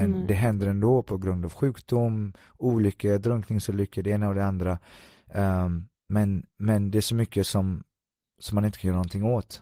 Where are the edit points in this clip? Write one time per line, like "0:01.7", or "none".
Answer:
none

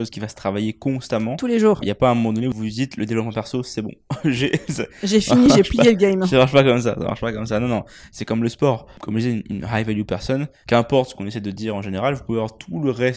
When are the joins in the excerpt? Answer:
none

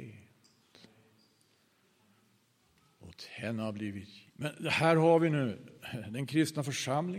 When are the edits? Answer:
0:04.3

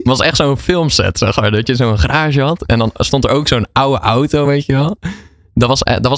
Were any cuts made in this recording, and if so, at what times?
none

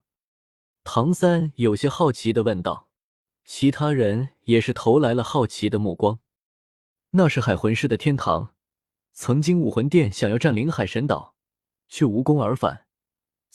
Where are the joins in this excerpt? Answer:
none

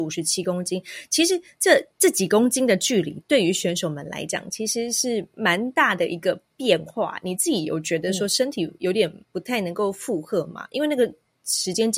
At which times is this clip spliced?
0:09.2

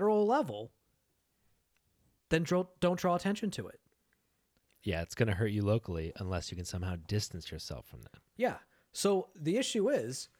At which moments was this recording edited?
none

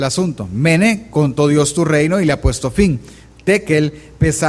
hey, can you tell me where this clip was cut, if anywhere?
none

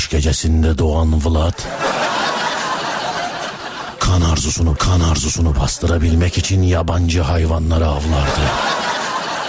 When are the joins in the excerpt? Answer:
0:04.8

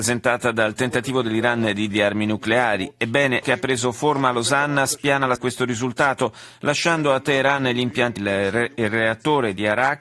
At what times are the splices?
0:01.9
0:03.4
0:05.4
0:08.2

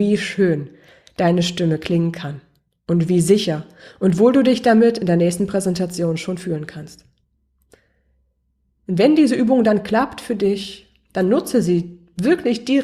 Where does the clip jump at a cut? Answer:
none

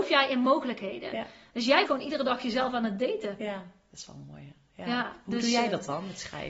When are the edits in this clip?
0:01.9

